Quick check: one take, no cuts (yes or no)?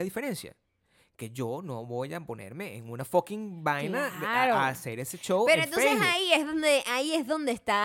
yes